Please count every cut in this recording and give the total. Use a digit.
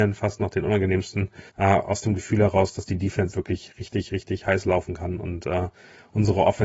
2